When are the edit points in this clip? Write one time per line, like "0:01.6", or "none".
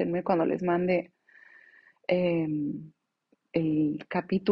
none

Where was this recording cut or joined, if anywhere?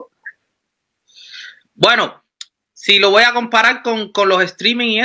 none

